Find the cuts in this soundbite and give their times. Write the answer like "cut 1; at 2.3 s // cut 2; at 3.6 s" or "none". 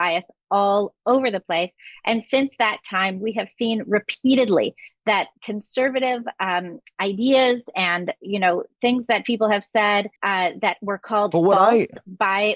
cut 1; at 10.2 s